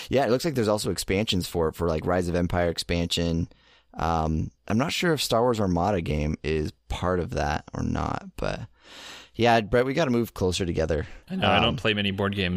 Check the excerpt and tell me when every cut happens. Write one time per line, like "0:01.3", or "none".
0:04.6
0:06.8
0:11.2